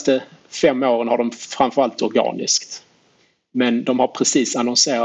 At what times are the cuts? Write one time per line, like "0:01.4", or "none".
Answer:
0:02.0